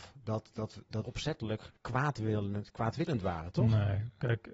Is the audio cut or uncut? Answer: cut